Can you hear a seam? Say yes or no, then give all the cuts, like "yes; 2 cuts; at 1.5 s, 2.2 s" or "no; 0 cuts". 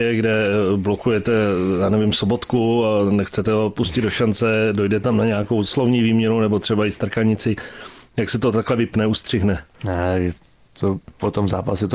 yes; 1 cut; at 9.7 s